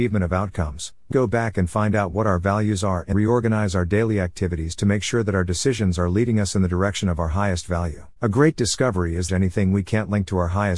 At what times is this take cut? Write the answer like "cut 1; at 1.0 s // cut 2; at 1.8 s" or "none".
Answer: cut 1; at 1.1 s // cut 2; at 3.1 s // cut 3; at 8.2 s // cut 4; at 9.3 s